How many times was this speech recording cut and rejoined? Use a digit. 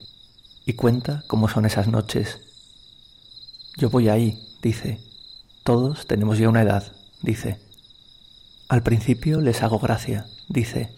0